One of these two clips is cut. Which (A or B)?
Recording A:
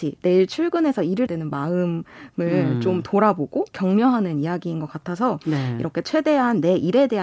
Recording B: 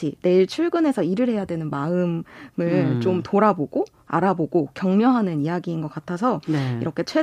A